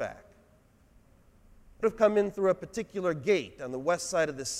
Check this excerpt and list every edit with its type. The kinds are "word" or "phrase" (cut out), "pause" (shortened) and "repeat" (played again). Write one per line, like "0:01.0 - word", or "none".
0:01.8 - phrase